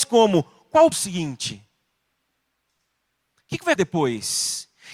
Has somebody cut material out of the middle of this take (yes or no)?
yes